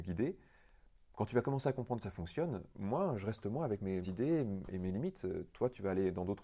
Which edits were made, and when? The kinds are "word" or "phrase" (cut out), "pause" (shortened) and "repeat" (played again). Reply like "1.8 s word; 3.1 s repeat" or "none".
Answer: 2.0 s word; 2.7 s pause; 4.0 s word